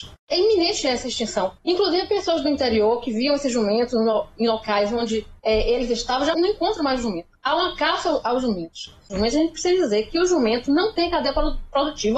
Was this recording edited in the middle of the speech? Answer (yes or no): yes